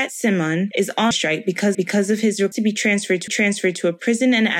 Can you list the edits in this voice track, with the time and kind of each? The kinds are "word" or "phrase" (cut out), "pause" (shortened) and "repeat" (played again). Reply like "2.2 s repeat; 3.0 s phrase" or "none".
1.1 s word; 1.7 s repeat; 2.5 s word; 3.3 s repeat